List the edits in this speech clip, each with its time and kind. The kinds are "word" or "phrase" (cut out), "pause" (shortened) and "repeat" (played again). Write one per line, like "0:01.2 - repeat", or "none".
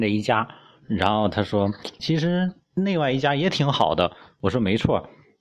0:02.0 - word